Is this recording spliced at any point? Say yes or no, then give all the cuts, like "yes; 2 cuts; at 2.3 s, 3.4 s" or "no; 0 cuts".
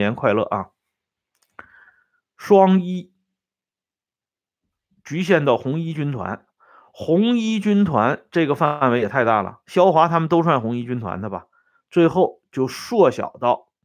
no; 0 cuts